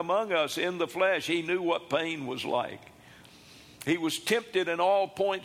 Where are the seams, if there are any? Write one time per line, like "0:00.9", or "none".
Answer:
none